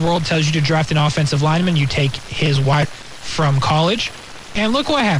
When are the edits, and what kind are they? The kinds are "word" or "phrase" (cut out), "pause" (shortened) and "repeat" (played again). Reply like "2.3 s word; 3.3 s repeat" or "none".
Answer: 2.8 s word